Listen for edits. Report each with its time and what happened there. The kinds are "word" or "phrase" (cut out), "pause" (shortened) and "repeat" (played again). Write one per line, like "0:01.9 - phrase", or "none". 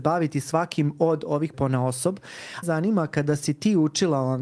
0:01.5 - word
0:02.6 - phrase